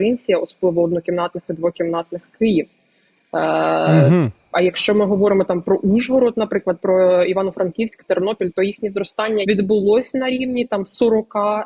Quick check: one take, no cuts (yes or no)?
no